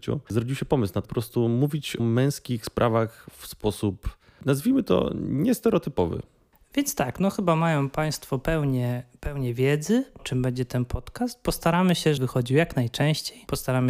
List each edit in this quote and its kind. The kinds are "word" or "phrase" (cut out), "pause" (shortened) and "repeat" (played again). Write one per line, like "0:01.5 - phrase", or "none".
0:01.0 - word
0:02.0 - word
0:10.2 - word
0:12.2 - word